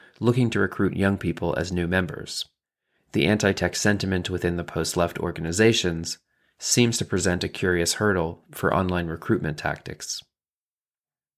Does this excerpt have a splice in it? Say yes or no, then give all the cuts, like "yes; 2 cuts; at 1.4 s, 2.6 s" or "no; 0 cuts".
no; 0 cuts